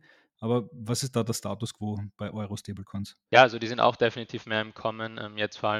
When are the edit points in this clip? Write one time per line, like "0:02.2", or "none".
none